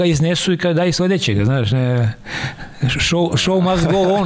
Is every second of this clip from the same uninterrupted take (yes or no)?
yes